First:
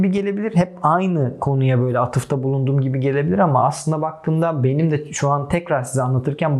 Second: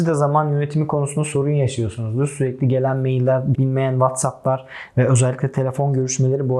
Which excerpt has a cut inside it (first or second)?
second